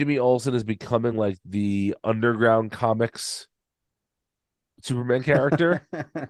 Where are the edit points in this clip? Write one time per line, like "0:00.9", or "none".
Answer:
none